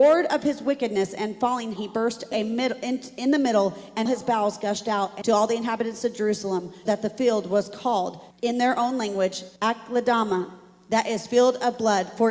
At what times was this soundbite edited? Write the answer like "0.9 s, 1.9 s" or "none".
1.8 s, 2.3 s, 4.1 s, 5.2 s, 6.9 s, 8.3 s, 9.6 s